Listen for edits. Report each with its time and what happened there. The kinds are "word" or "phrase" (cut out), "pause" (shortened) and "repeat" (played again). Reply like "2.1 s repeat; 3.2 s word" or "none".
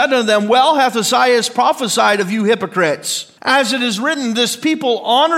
3.4 s pause